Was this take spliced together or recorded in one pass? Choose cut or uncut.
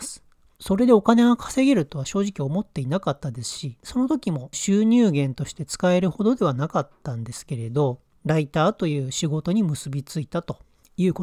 uncut